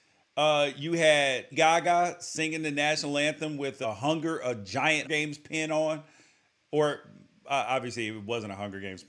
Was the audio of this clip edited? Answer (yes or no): yes